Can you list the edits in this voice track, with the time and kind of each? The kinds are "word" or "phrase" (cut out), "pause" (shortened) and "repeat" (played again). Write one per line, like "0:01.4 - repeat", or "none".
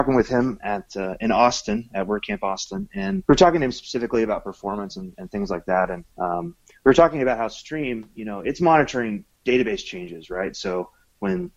0:03.2 - pause
0:06.1 - pause
0:09.3 - pause